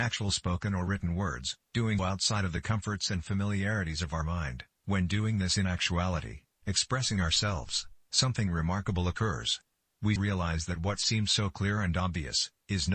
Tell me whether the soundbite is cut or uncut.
cut